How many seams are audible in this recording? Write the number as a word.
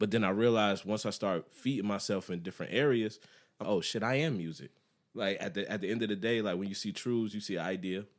one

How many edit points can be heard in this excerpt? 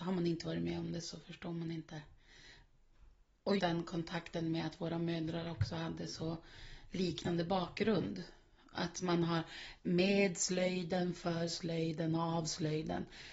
two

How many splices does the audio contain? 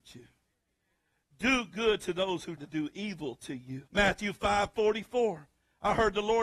two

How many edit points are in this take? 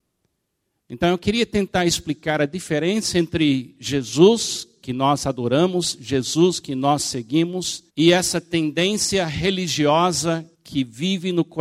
two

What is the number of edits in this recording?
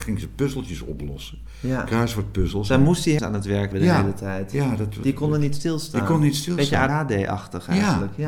three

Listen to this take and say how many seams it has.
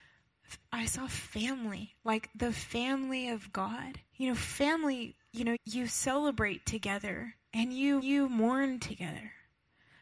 three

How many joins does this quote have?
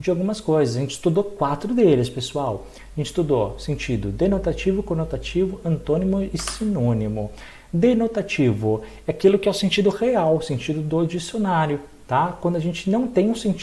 zero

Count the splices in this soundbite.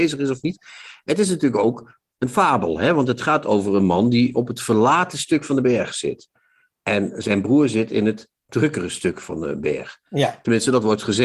zero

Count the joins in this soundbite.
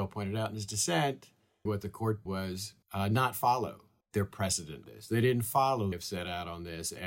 six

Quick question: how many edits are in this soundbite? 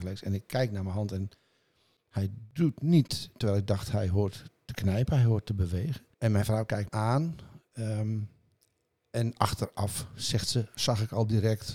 two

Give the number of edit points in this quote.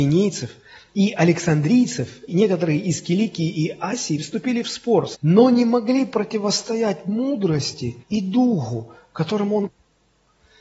four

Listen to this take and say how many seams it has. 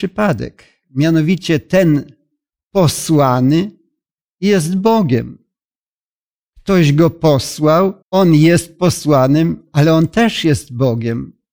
one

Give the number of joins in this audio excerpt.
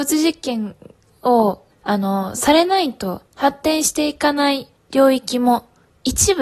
three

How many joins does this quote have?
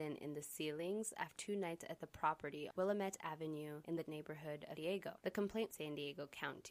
five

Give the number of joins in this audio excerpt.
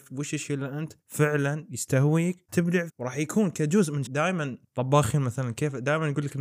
four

